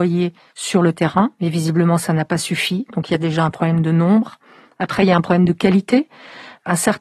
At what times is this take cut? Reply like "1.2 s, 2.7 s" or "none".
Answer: none